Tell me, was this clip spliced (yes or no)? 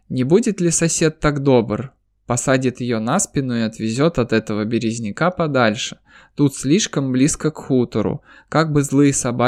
no